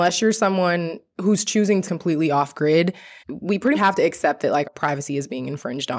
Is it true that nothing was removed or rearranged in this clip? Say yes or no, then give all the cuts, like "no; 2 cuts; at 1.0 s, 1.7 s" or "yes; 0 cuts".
no; 4 cuts; at 1.8 s, 3.2 s, 3.7 s, 4.6 s